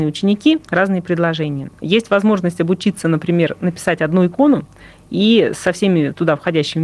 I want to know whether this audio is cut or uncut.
cut